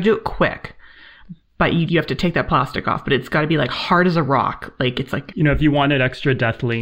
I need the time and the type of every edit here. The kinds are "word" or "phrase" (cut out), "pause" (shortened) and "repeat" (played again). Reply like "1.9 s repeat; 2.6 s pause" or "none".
1.4 s pause; 1.9 s word